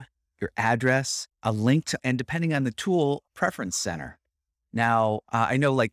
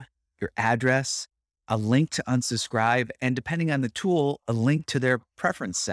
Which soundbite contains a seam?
first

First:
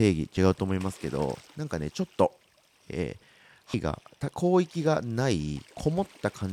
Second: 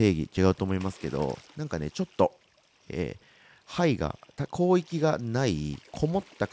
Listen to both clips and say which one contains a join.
first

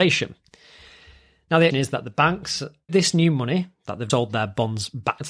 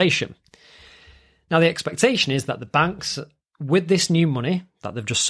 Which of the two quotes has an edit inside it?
first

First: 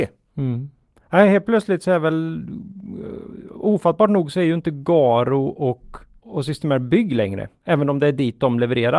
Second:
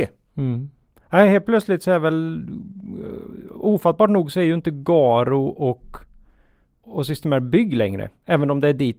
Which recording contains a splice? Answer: first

